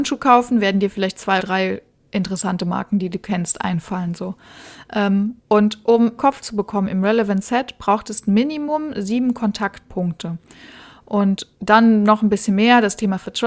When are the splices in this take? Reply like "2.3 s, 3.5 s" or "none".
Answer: 1.4 s, 5.4 s, 6.2 s, 11.5 s